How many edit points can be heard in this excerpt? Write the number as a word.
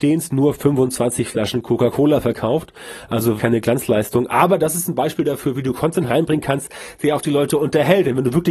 two